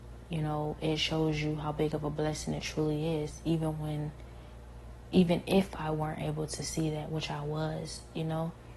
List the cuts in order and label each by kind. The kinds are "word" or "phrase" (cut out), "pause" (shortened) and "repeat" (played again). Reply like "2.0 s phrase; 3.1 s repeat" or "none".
none